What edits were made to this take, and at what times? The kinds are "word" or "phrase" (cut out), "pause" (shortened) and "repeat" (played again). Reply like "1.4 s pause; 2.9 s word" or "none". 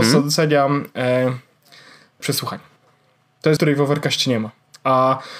2.2 s word; 3.6 s word